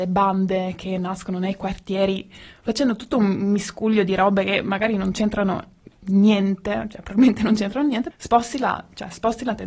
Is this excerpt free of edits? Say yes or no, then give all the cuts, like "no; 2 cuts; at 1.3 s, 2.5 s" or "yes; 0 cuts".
no; 1 cut; at 8.1 s